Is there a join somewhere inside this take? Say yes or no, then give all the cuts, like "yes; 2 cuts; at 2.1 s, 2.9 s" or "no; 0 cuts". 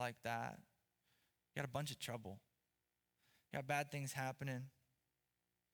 no; 0 cuts